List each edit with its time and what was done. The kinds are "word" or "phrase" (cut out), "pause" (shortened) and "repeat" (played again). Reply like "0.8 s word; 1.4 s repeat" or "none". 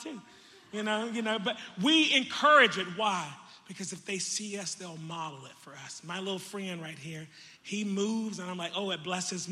7.6 s pause